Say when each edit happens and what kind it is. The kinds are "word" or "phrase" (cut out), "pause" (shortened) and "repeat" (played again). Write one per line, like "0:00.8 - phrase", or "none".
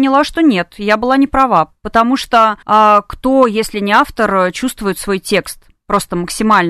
0:02.6 - pause